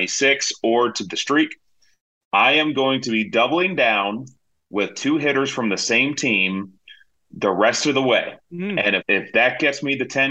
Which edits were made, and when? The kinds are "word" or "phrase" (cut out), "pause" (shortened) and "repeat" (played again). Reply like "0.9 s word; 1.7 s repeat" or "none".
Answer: 1.1 s word; 8.4 s pause; 9.0 s word